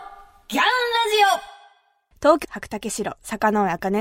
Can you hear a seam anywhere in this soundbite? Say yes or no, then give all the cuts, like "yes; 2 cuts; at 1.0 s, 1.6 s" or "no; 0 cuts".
yes; 1 cut; at 2.4 s